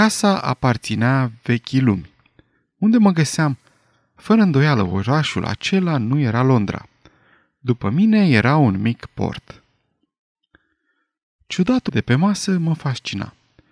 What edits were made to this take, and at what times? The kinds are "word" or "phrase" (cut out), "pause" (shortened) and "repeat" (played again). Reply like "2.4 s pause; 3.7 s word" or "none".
11.9 s word